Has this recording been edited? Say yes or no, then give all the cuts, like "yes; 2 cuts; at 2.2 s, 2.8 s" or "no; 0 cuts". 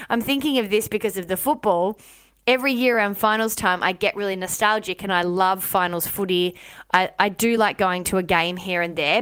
no; 0 cuts